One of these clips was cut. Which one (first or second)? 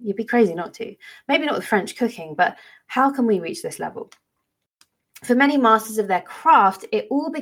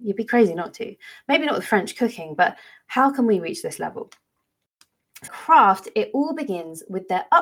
second